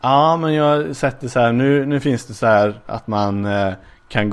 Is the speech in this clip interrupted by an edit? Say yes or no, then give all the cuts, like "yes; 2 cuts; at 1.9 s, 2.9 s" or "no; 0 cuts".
no; 0 cuts